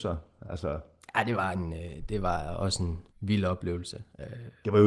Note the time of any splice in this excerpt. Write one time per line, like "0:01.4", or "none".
0:03.1

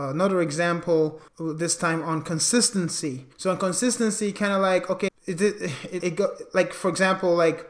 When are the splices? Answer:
0:01.3
0:03.3
0:05.1
0:06.0

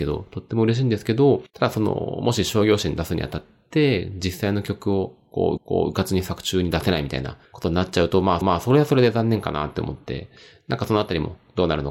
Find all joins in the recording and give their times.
0:05.6
0:07.5
0:08.4

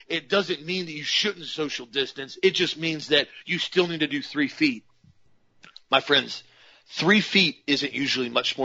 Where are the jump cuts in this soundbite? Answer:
none

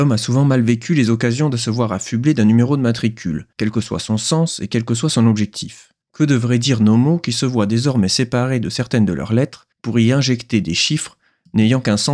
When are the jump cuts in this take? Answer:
0:03.5
0:06.0
0:09.7

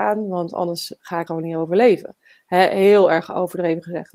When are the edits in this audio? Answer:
0:01.3

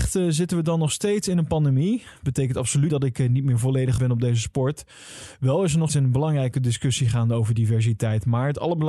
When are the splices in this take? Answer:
0:02.9
0:04.0
0:05.9

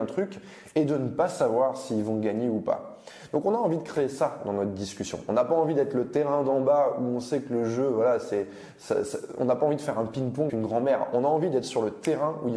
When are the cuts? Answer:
0:10.5

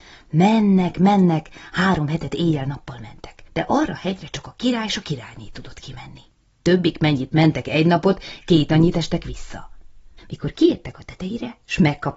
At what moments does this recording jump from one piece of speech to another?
0:03.5
0:06.5
0:10.2

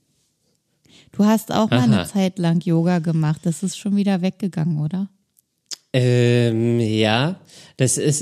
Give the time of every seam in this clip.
none

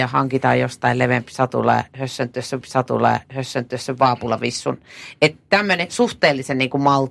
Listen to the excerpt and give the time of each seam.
0:02.6

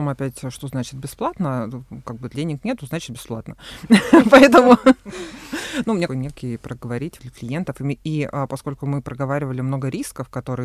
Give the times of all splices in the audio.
0:02.3
0:06.1
0:07.2

